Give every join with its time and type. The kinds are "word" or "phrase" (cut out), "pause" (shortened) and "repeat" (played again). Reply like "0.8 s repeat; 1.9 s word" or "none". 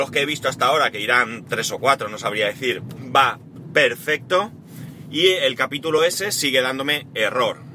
none